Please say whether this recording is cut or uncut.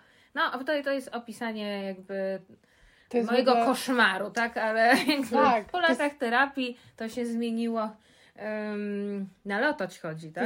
uncut